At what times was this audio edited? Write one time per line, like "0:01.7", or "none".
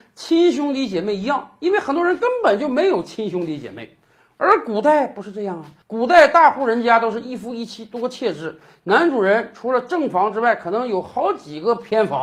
none